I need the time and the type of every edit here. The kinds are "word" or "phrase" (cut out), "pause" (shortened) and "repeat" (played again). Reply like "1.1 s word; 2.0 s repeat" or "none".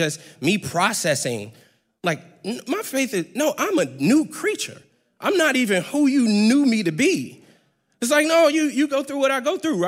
none